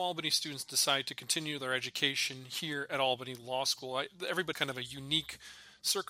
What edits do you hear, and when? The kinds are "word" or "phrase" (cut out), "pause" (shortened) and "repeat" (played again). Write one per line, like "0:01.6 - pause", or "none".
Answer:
0:04.5 - word